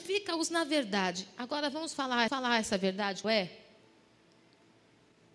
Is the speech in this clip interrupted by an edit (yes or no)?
yes